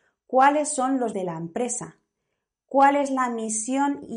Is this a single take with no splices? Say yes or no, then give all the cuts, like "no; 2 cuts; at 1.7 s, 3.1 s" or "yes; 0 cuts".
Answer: no; 1 cut; at 1.1 s